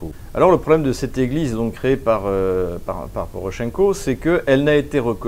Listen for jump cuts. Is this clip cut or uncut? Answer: uncut